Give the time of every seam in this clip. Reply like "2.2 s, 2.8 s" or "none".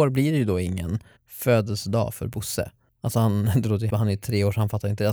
1.2 s, 2.9 s, 3.9 s